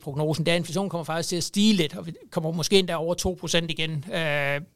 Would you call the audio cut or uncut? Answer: uncut